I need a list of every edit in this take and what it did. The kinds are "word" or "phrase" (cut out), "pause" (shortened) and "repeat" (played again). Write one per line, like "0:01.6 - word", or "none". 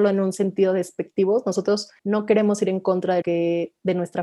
0:02.0 - pause
0:03.2 - word